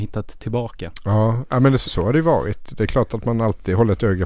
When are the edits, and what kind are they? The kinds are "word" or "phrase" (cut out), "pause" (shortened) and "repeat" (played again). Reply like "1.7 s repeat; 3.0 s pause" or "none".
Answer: 1.8 s word